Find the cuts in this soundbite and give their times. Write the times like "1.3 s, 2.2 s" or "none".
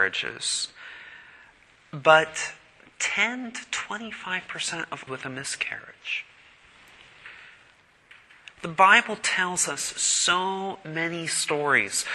5.1 s